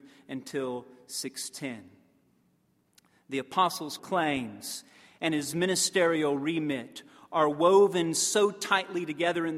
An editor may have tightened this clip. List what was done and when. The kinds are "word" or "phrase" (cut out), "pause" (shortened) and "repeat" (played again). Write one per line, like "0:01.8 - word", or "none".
0:04.0 - word

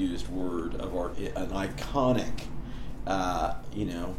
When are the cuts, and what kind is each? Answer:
0:01.1 - word

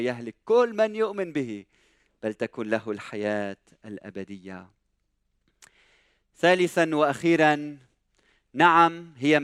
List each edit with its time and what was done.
none

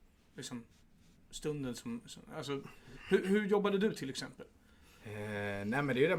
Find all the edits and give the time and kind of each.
none

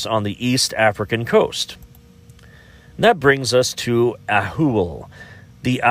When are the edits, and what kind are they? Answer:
none

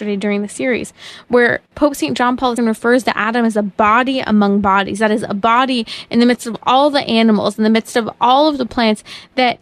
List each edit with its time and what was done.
0:02.6 - word

